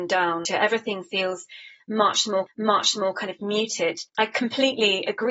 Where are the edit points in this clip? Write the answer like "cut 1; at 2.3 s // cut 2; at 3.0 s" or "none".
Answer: cut 1; at 2.5 s // cut 2; at 4.1 s